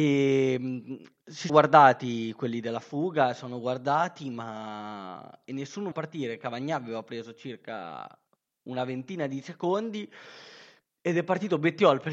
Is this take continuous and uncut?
no; 2 cuts; at 1.5 s, 5.9 s

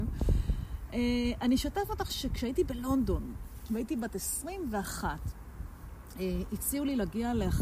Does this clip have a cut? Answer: no; 0 cuts

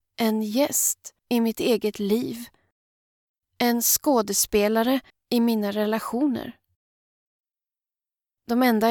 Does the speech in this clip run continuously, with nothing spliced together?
no; 2 cuts; at 1.2 s, 5.1 s

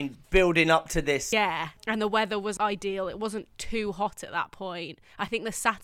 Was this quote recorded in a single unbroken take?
no; 1 cut; at 2.6 s

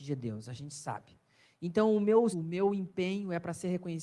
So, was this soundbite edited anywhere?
yes; 1 cut; at 2.3 s

